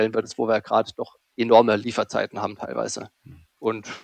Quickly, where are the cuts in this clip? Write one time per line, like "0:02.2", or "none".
none